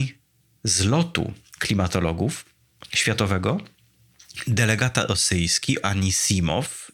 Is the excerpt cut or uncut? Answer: cut